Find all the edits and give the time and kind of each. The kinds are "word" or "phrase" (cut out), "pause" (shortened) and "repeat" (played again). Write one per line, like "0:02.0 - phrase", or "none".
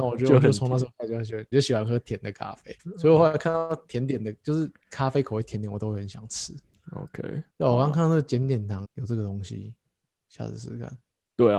0:01.5 - word
0:02.8 - pause
0:07.5 - pause
0:08.8 - word